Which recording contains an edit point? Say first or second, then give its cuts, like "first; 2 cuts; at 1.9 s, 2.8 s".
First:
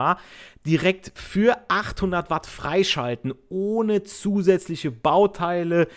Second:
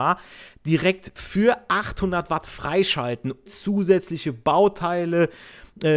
second; 1 cut; at 3.5 s